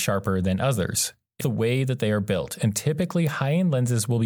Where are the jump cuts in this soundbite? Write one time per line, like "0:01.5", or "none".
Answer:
0:01.4

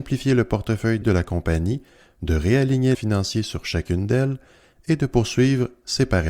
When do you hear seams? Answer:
0:01.0
0:02.9

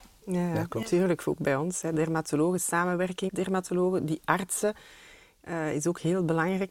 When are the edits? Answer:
0:03.3

